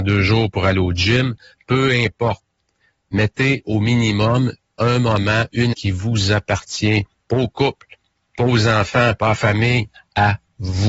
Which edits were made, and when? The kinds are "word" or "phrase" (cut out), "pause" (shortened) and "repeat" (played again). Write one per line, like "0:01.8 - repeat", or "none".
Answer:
0:05.7 - word

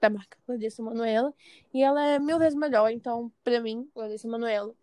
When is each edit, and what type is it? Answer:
none

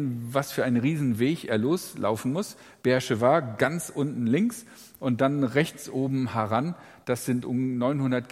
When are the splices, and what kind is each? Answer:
none

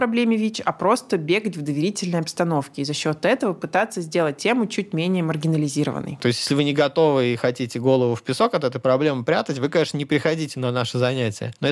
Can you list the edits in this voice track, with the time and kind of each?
none

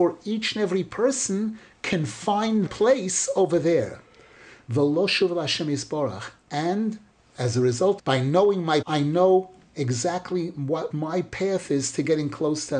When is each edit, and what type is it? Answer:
0:02.7 - word
0:08.0 - word
0:08.8 - word
0:10.9 - word

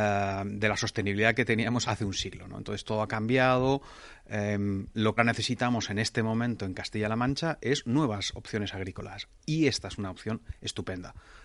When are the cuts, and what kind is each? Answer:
0:01.8 - word
0:05.2 - phrase

